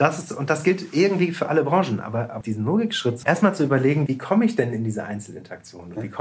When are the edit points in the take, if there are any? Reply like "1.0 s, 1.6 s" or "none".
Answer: 2.4 s, 3.2 s, 4.1 s